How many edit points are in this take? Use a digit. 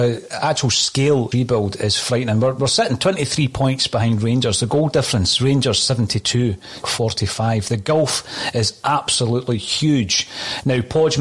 2